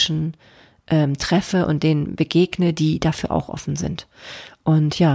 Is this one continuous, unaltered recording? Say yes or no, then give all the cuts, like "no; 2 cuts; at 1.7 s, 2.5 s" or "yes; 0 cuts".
yes; 0 cuts